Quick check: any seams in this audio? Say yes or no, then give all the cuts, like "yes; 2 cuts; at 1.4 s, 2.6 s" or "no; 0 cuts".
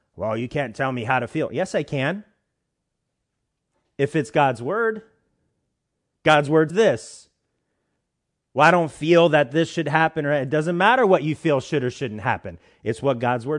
yes; 1 cut; at 6.7 s